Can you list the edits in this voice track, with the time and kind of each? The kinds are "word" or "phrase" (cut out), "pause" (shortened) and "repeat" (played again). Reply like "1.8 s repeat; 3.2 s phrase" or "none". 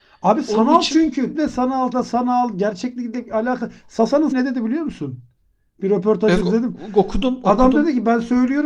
1.3 s word; 1.9 s word; 4.3 s word; 6.4 s word